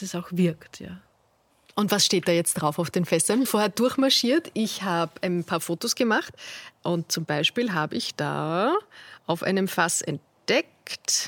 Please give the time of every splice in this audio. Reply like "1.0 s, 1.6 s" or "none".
3.4 s